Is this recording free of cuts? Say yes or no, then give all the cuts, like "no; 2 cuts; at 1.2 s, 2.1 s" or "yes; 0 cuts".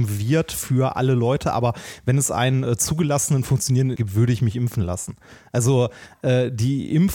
no; 1 cut; at 4.0 s